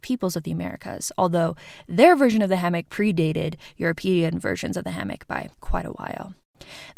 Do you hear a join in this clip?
yes; 1 cut; at 5.5 s

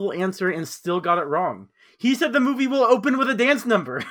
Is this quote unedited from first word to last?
yes; 0 cuts

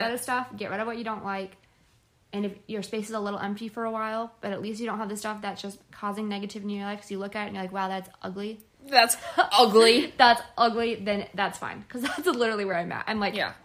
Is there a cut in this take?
no; 0 cuts

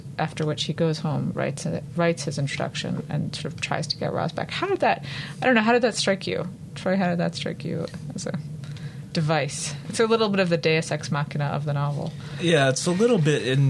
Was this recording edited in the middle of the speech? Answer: no; 0 cuts

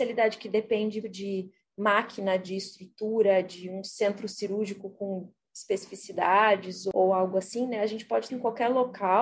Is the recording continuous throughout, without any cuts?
no; 2 cuts; at 1.0 s, 8.3 s

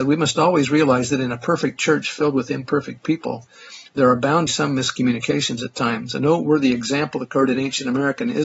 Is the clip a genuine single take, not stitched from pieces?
no; 1 cut; at 4.5 s

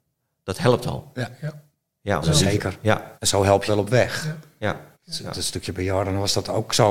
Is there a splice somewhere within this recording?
yes; 4 cuts; at 2.2 s, 3.2 s, 3.7 s, 4.9 s

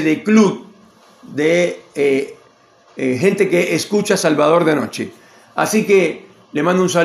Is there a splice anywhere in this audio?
no; 0 cuts

